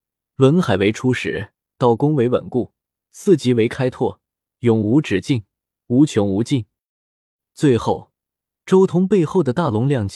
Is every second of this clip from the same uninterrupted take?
yes; 0 cuts

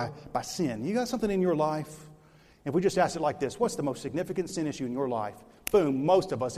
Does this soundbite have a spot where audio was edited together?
no; 0 cuts

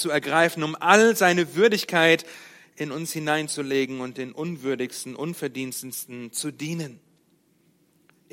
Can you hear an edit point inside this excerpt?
no; 0 cuts

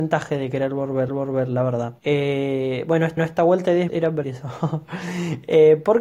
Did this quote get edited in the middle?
yes; 5 cuts; at 1.1 s, 2.0 s, 3.2 s, 3.9 s, 4.2 s

